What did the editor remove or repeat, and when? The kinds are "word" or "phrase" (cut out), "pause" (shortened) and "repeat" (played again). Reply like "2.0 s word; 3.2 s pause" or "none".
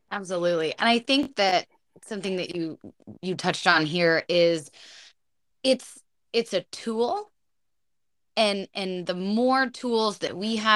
none